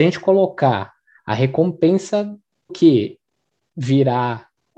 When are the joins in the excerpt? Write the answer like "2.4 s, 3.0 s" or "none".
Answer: 1.2 s, 2.7 s